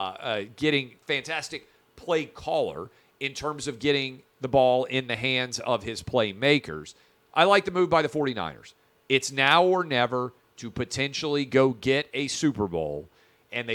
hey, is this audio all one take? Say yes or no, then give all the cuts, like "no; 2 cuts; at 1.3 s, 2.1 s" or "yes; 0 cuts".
yes; 0 cuts